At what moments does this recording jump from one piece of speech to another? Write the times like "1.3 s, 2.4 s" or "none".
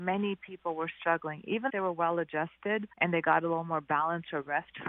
1.7 s, 2.9 s